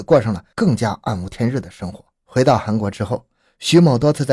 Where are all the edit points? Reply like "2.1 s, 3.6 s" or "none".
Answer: 2.1 s